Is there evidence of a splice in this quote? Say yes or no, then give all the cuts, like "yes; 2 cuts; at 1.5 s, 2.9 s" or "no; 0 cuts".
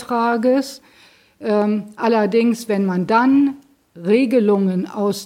no; 0 cuts